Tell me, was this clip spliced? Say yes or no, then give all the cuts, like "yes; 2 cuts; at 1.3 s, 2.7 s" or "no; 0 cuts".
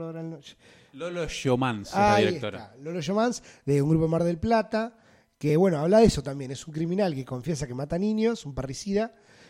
no; 0 cuts